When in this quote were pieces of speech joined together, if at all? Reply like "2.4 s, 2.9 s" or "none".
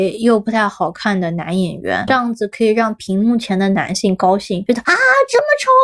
2.1 s